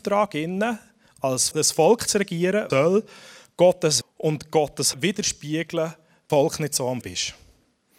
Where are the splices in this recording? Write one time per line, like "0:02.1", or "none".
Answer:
0:01.5
0:02.7
0:04.0
0:04.9
0:06.3
0:07.0